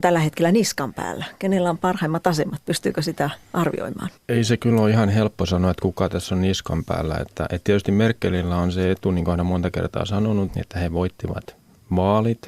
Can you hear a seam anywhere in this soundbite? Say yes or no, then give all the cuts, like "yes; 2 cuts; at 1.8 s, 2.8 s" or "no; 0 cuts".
yes; 2 cuts; at 4.2 s, 10.5 s